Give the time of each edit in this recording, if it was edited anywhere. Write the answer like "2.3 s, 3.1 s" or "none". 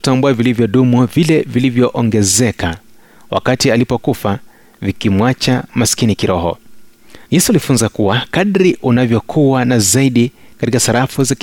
7.2 s, 8.8 s